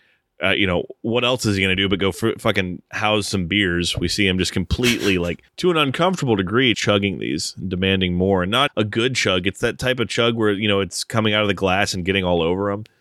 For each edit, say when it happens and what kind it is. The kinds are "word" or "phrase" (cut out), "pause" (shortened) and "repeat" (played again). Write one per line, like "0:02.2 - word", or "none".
0:05.5 - pause
0:06.7 - word
0:08.7 - word

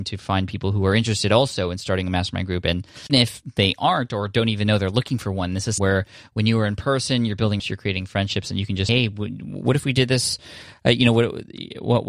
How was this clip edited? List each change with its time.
0:03.1 - word
0:05.8 - word
0:07.6 - word
0:08.9 - word

